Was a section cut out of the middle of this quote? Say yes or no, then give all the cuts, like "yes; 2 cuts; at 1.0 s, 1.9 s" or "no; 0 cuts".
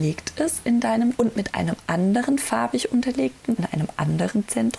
yes; 2 cuts; at 1.2 s, 3.6 s